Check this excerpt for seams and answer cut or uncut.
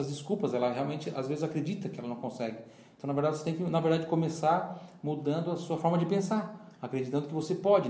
uncut